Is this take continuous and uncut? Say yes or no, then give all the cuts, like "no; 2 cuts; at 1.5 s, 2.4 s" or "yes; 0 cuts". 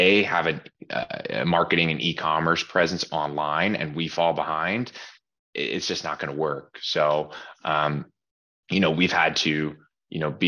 yes; 0 cuts